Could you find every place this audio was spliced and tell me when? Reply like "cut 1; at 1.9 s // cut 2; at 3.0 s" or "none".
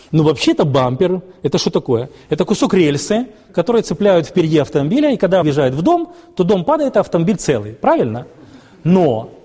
cut 1; at 5.4 s